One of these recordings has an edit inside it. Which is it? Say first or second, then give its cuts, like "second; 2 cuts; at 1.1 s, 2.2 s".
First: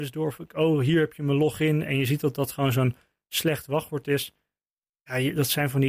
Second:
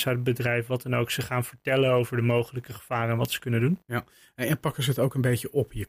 second; 1 cut; at 3.8 s